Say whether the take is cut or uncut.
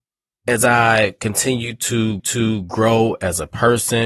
cut